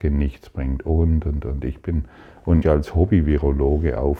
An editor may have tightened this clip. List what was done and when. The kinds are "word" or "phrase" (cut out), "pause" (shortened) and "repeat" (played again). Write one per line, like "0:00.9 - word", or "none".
0:02.6 - word